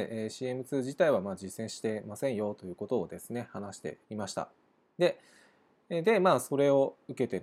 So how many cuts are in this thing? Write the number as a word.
one